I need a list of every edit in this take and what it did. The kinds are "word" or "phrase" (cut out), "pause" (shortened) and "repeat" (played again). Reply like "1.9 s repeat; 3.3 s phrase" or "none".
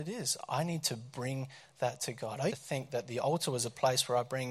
2.5 s word